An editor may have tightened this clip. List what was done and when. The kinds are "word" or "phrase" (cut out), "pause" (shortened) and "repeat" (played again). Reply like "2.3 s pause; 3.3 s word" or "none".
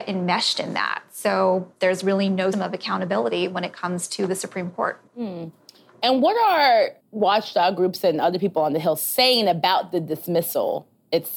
2.5 s word; 5.1 s pause; 7.0 s pause